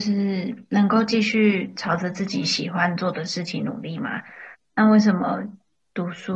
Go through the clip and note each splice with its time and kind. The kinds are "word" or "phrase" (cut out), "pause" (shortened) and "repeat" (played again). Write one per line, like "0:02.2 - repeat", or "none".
0:04.5 - pause